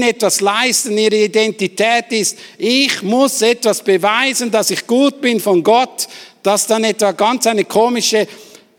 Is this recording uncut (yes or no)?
yes